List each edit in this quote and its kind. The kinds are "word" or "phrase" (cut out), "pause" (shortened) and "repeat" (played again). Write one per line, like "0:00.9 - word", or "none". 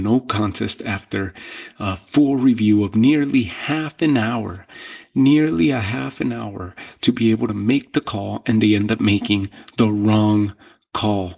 none